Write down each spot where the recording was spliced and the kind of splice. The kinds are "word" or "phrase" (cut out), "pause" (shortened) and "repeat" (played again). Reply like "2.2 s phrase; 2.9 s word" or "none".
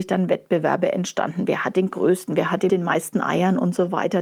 2.7 s word